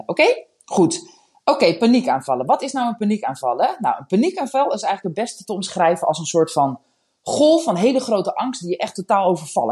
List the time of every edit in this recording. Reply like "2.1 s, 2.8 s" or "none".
none